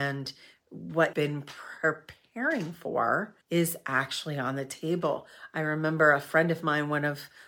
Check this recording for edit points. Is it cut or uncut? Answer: cut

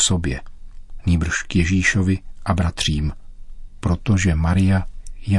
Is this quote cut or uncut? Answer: uncut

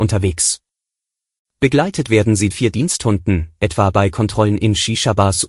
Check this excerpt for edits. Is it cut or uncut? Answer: cut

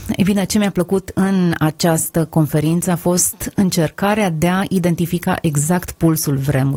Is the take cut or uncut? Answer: uncut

